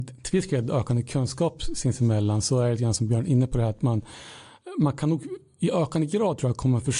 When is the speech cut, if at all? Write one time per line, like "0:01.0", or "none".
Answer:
none